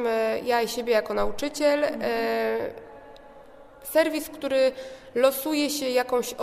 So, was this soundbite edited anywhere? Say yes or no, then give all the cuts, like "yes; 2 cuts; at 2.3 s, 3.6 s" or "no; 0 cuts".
no; 0 cuts